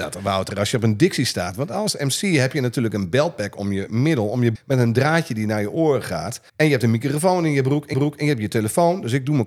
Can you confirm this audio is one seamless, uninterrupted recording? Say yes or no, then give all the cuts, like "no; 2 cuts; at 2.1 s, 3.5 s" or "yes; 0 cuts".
no; 3 cuts; at 4.5 s, 6.5 s, 7.9 s